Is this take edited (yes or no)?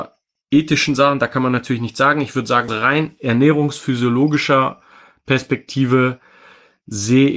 yes